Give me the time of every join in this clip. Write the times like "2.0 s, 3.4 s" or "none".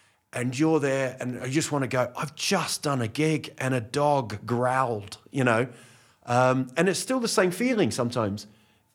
none